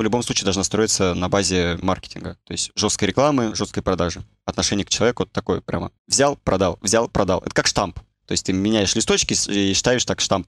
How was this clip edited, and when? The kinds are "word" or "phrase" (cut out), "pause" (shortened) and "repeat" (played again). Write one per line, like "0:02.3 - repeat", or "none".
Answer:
0:01.8 - word
0:06.0 - pause